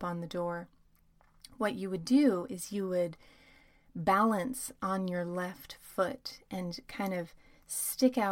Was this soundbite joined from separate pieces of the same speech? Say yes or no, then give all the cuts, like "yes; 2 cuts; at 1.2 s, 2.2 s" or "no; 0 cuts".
no; 0 cuts